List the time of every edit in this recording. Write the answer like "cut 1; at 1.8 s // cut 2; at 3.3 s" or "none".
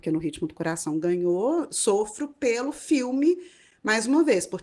none